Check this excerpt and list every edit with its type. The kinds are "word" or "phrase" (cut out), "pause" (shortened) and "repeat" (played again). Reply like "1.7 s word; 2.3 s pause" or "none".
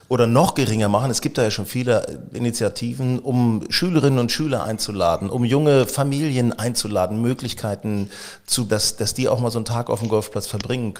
8.7 s word